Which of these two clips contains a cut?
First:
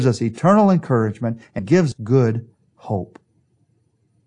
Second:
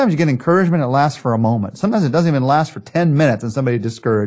first; 2 cuts; at 1.6 s, 1.9 s

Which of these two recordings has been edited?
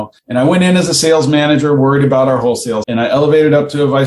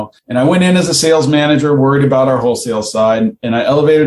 first; 1 cut; at 2.8 s

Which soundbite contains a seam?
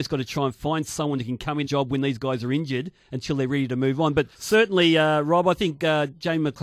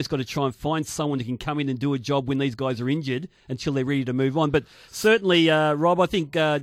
first; 2 cuts; at 1.6 s, 4.3 s

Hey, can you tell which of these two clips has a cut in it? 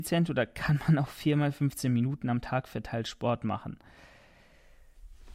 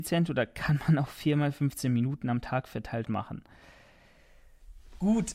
second; 1 cut; at 3.0 s

